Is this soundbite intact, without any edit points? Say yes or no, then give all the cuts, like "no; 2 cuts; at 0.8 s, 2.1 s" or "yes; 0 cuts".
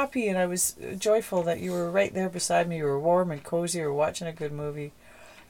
yes; 0 cuts